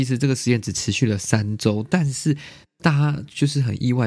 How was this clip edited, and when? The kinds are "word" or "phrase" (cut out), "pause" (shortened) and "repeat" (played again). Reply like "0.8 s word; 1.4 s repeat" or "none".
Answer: none